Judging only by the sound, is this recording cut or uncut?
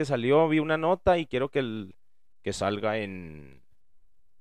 uncut